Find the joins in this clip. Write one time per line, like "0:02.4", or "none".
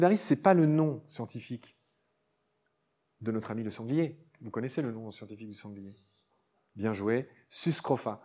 none